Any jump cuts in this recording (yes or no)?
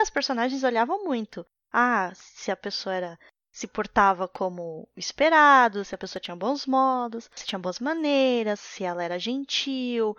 no